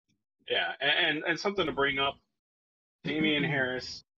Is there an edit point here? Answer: no; 0 cuts

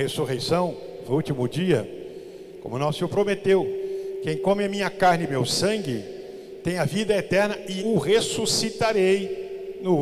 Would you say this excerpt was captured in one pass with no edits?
no; 3 cuts; at 1.0 s, 5.3 s, 7.8 s

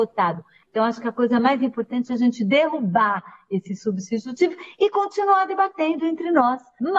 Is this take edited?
no; 0 cuts

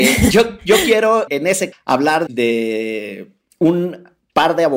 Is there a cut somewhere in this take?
yes; 3 cuts; at 1.3 s, 1.7 s, 2.3 s

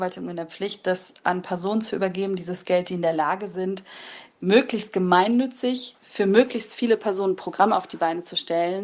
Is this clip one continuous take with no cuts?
yes; 0 cuts

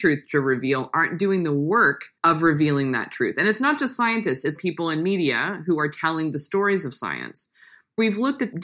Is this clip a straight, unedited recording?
no; 2 cuts; at 2.2 s, 4.5 s

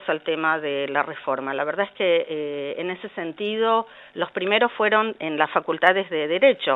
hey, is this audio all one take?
yes; 0 cuts

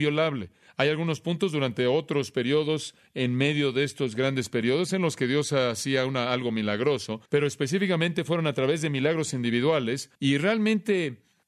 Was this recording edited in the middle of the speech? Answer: yes; 2 cuts; at 7.3 s, 10.2 s

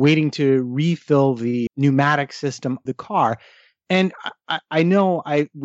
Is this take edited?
yes; 2 cuts; at 1.7 s, 2.9 s

